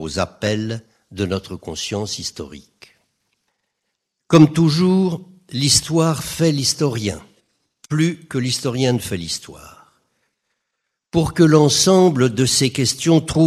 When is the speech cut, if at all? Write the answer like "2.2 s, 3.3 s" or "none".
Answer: none